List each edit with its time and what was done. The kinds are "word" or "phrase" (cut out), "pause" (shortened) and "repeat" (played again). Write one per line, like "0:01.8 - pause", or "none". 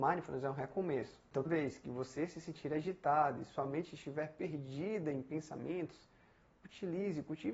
0:01.4 - word